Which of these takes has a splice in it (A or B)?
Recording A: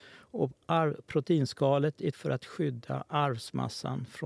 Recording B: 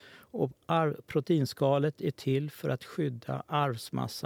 A